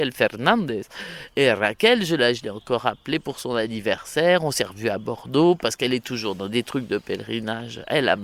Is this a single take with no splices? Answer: yes; 0 cuts

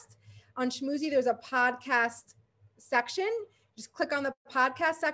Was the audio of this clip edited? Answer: no; 0 cuts

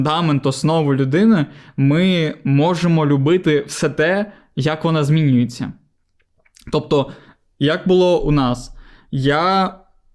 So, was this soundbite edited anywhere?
no; 0 cuts

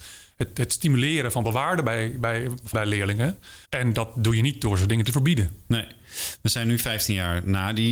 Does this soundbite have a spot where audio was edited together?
yes; 3 cuts; at 1.4 s, 2.7 s, 3.7 s

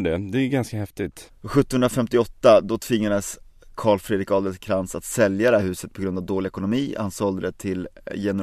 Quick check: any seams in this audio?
no; 0 cuts

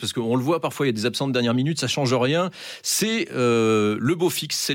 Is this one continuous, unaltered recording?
yes; 0 cuts

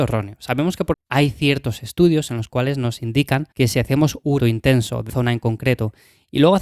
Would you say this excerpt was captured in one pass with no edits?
no; 4 cuts; at 0.9 s, 3.5 s, 4.4 s, 5.1 s

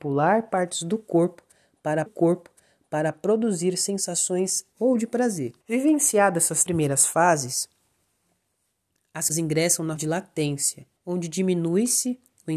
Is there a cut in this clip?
yes; 7 cuts; at 2.1 s, 4.7 s, 5.6 s, 6.6 s, 9.3 s, 10.0 s, 11.0 s

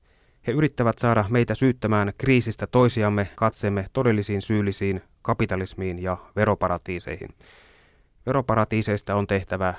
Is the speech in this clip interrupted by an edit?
yes; 1 cut; at 3.3 s

